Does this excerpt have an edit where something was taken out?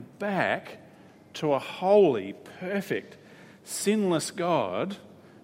no; 0 cuts

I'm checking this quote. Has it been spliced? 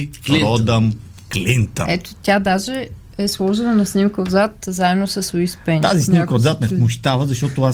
no; 0 cuts

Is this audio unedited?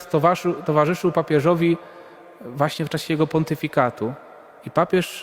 yes; 0 cuts

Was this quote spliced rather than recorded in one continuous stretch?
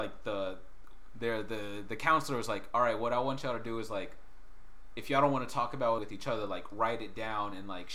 yes; 1 cut; at 6.0 s

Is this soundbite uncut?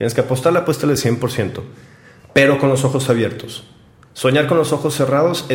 yes; 0 cuts

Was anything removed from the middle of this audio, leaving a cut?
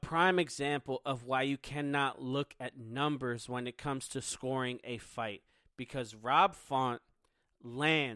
no; 0 cuts

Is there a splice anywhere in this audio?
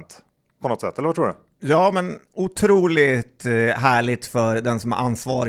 no; 0 cuts

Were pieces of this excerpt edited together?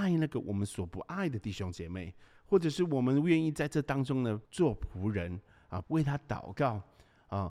yes; 2 cuts; at 4.4 s, 5.8 s

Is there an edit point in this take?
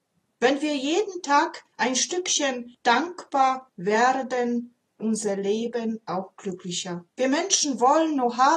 yes; 3 cuts; at 1.7 s, 5.0 s, 7.1 s

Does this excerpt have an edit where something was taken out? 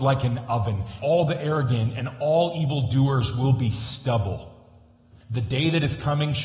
yes; 2 cuts; at 1.0 s, 5.2 s

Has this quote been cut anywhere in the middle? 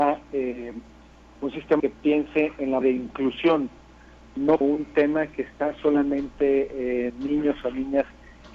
yes; 4 cuts; at 1.8 s, 2.8 s, 4.6 s, 7.1 s

